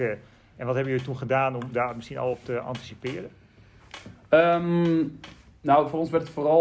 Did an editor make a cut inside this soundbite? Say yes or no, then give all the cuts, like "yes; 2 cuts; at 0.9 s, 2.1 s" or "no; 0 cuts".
no; 0 cuts